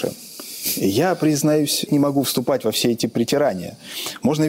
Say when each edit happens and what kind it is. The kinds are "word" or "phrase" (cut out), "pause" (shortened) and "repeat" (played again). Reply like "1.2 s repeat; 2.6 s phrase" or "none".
1.9 s word

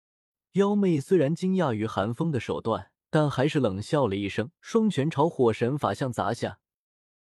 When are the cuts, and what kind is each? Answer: 3.0 s pause; 4.6 s pause

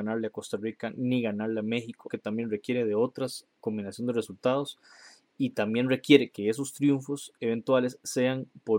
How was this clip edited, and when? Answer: 2.1 s word

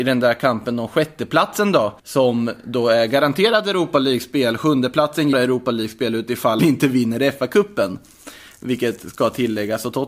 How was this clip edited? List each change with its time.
2.0 s pause; 5.3 s phrase; 6.6 s phrase

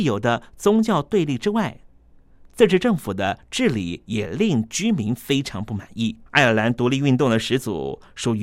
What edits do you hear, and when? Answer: 6.3 s pause

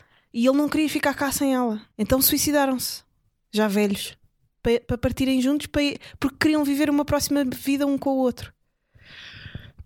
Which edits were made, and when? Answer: 1.9 s pause; 3.4 s pause

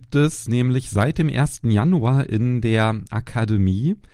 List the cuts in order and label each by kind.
none

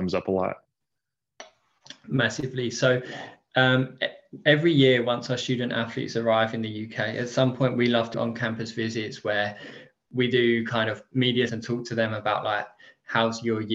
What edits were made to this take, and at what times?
8.1 s word; 11.5 s word

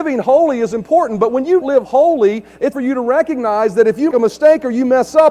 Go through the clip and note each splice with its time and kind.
1.6 s word; 2.7 s word; 4.1 s word

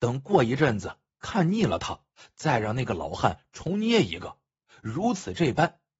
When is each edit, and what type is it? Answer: none

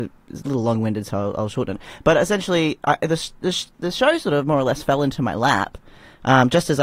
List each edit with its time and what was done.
none

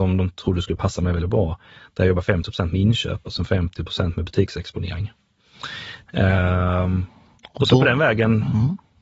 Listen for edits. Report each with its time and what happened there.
none

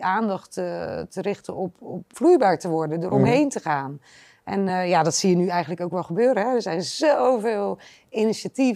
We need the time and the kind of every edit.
none

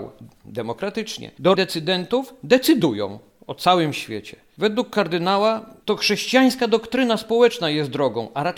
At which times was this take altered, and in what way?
1.5 s word

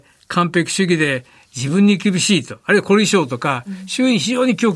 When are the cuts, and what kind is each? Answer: none

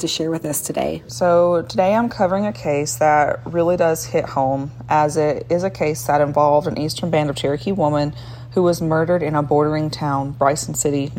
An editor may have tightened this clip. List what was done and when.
none

